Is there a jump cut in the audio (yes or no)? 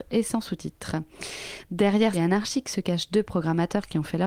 yes